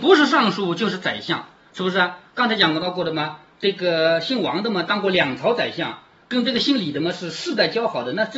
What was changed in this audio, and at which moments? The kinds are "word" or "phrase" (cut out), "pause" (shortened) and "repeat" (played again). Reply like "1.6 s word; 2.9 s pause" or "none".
none